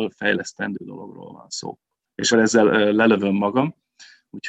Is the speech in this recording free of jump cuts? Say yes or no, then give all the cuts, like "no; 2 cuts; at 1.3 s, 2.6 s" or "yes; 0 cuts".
no; 1 cut; at 2.3 s